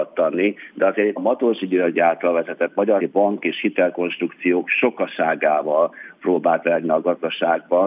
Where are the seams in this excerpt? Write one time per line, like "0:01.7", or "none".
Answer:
0:01.2
0:03.0
0:06.6